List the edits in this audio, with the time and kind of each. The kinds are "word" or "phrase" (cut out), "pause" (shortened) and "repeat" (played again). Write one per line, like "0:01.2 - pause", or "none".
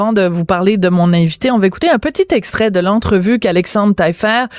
none